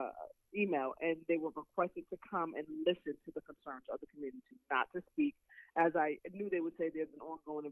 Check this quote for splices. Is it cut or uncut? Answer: uncut